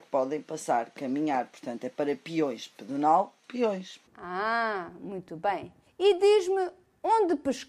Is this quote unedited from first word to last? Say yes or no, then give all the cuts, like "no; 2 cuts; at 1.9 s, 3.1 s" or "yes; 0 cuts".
no; 2 cuts; at 4.1 s, 5.9 s